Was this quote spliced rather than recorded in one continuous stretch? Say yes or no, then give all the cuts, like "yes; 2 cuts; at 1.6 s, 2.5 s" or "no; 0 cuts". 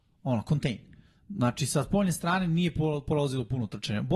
no; 0 cuts